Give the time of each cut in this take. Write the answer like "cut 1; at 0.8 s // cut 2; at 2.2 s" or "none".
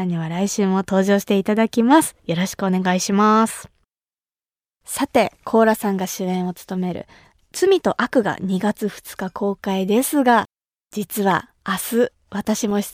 cut 1; at 11.6 s